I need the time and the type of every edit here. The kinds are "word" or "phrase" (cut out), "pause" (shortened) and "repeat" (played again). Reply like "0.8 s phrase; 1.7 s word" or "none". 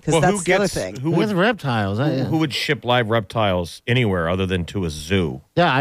none